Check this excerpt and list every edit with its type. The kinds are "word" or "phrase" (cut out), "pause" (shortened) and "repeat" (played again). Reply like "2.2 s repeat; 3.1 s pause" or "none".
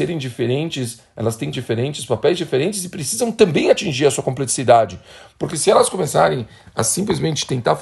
1.5 s word